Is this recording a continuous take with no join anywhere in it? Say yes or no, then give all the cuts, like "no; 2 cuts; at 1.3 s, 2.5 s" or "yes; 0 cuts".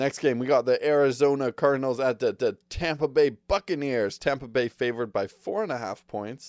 no; 1 cut; at 2.4 s